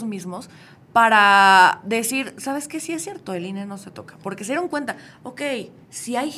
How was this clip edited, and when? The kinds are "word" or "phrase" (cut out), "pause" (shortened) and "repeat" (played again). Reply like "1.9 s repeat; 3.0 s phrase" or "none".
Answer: none